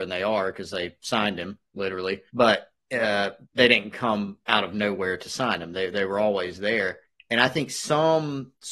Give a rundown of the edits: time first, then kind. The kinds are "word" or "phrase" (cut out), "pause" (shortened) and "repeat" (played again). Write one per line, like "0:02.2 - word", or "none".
0:02.3 - pause
0:03.4 - pause
0:04.4 - pause
0:07.0 - pause